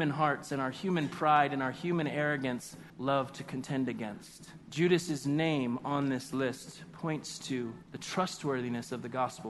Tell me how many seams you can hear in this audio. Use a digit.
3